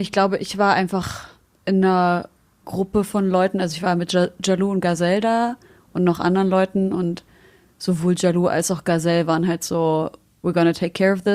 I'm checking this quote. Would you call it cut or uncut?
uncut